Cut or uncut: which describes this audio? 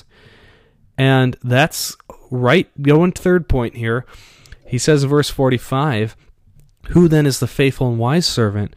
cut